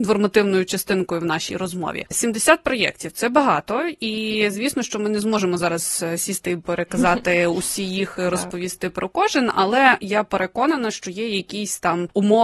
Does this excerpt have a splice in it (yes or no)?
no